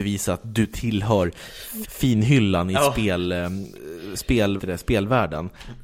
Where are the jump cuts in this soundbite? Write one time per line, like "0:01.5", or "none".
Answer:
0:01.8
0:04.6